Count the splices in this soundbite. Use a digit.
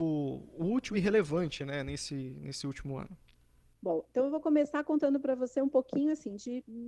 0